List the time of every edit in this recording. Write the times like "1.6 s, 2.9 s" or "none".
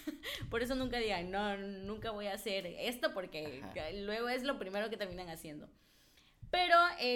none